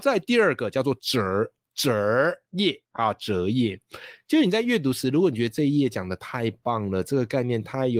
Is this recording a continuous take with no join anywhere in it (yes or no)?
no